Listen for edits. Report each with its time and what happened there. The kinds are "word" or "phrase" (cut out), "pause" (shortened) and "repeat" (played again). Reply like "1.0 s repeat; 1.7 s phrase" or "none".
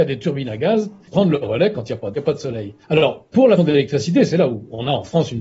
1.1 s phrase; 2.1 s phrase; 2.8 s pause; 3.6 s word